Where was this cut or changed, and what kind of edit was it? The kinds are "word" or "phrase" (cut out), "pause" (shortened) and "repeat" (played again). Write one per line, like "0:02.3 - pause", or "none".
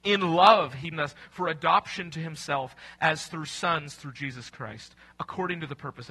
0:00.9 - word